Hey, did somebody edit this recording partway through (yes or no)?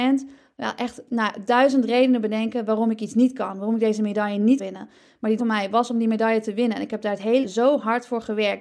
yes